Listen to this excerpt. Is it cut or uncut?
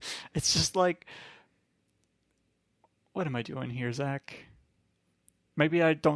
uncut